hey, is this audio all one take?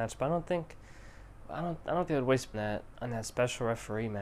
no; 2 cuts; at 2.1 s, 2.5 s

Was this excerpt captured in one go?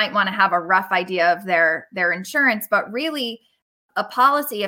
yes; 0 cuts

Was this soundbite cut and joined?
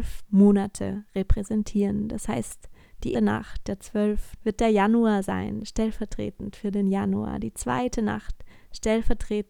yes; 2 cuts; at 3.1 s, 4.4 s

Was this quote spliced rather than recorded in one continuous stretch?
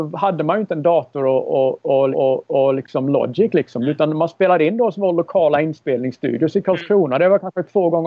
yes; 1 cut; at 2.1 s

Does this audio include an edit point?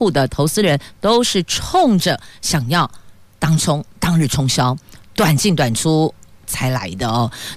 no; 0 cuts

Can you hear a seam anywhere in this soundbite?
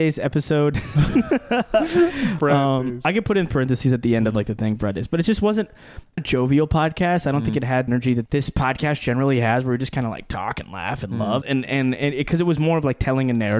yes; 4 cuts; at 6.2 s, 7.9 s, 8.3 s, 11.4 s

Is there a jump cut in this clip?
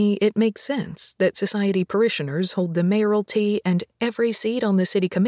no; 0 cuts

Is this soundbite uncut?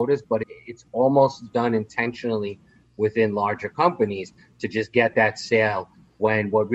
yes; 0 cuts

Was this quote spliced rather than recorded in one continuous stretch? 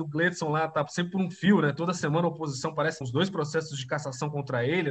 yes; 1 cut; at 3.0 s

